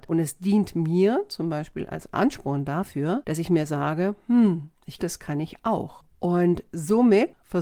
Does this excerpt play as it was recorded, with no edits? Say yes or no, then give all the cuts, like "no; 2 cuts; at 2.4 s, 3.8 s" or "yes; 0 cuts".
no; 1 cut; at 5.0 s